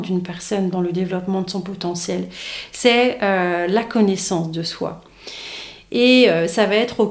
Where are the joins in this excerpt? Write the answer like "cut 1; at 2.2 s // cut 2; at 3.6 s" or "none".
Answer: none